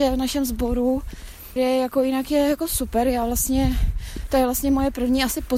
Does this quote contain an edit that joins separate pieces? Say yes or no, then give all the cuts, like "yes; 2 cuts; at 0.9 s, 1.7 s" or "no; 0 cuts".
yes; 1 cut; at 1.6 s